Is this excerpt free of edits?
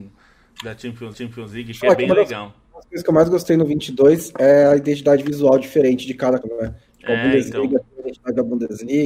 no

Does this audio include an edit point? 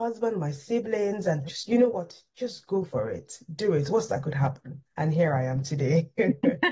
yes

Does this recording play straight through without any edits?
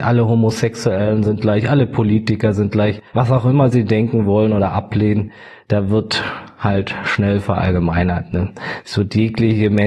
no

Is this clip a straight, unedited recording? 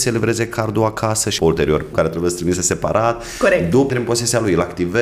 no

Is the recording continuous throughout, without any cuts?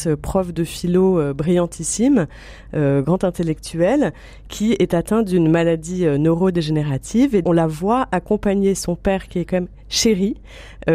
no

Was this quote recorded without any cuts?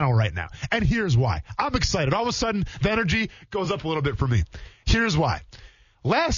yes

